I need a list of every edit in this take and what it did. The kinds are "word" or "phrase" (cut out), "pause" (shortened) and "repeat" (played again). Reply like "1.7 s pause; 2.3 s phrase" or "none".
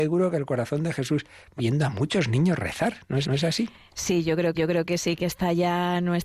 1.6 s phrase; 3.2 s repeat; 4.5 s repeat